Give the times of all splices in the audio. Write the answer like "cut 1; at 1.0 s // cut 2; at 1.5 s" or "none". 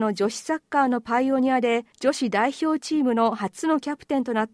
cut 1; at 1.9 s